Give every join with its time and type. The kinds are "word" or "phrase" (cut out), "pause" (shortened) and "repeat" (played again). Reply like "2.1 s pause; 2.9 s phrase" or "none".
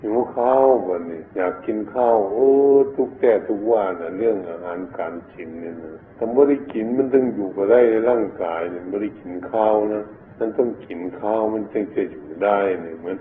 1.3 s pause; 6.1 s pause; 10.3 s pause